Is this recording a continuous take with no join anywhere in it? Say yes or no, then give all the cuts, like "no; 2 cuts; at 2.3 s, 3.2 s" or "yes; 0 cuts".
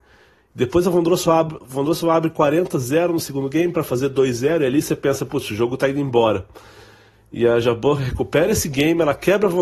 yes; 0 cuts